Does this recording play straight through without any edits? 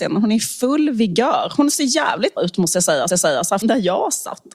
no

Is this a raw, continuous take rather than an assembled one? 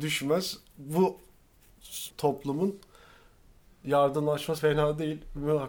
no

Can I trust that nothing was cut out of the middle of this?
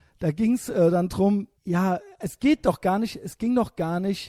no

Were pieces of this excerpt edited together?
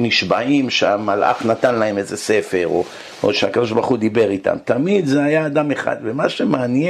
no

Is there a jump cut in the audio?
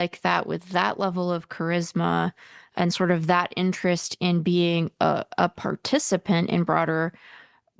no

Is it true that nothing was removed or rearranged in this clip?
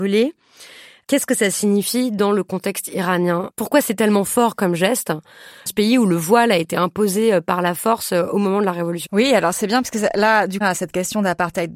no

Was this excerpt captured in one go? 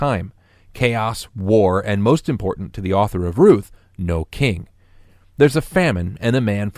yes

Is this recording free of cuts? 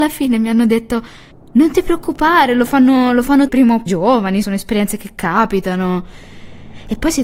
no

